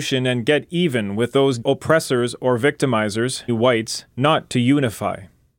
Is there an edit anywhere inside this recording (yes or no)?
yes